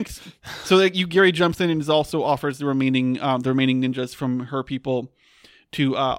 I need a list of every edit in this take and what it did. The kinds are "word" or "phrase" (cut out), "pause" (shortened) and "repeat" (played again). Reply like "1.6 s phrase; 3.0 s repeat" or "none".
none